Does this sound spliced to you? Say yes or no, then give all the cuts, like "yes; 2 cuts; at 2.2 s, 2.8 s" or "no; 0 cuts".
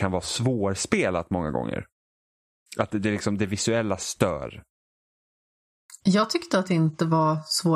no; 0 cuts